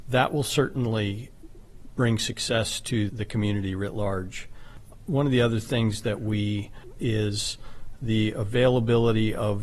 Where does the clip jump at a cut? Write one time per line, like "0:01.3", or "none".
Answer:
0:03.1
0:07.0